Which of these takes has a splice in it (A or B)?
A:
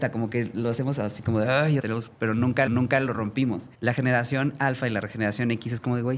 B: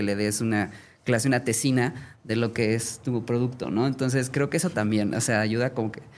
A